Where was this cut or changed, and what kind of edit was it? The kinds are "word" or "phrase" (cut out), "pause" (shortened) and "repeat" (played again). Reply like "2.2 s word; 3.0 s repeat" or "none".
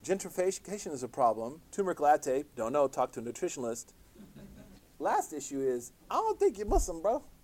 1.7 s pause; 2.5 s pause; 6.0 s pause